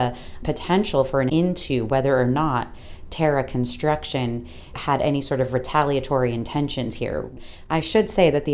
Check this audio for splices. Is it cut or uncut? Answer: cut